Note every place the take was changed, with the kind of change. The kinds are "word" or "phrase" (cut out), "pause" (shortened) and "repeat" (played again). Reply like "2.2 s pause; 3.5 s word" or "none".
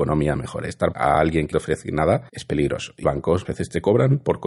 0.9 s phrase; 1.5 s word; 2.3 s pause; 3.0 s word; 3.4 s word